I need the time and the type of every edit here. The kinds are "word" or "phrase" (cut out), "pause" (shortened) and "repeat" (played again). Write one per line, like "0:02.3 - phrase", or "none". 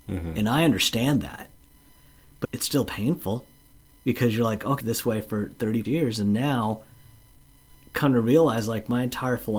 0:02.4 - word
0:04.8 - phrase
0:05.8 - word